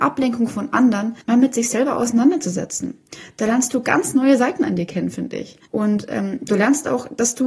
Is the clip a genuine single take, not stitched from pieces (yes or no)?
no